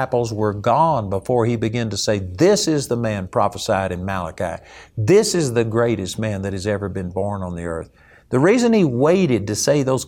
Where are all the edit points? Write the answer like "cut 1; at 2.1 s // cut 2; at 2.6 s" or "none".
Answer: none